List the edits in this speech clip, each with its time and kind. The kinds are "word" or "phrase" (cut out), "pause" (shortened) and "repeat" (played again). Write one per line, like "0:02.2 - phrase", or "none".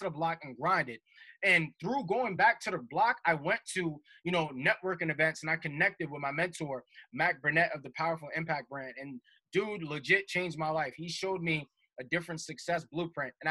none